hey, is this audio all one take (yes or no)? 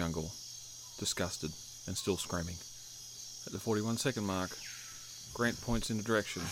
yes